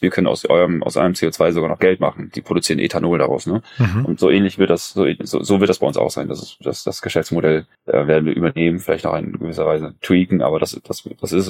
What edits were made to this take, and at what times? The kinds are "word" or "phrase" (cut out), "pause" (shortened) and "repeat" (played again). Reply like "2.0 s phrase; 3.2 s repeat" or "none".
7.7 s pause